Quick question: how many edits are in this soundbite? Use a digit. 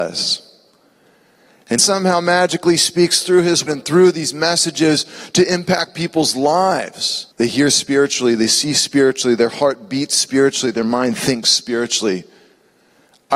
3